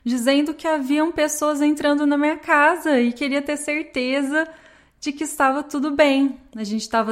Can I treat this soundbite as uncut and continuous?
yes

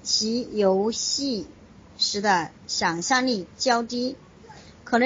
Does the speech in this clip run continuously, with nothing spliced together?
yes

